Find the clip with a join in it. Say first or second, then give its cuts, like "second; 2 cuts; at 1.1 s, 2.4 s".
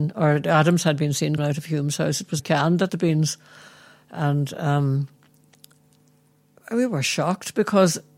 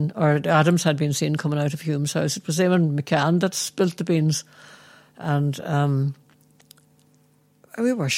first; 3 cuts; at 1.4 s, 2.4 s, 2.9 s